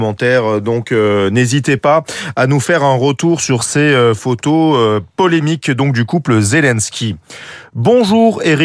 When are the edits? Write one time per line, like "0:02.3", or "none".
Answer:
none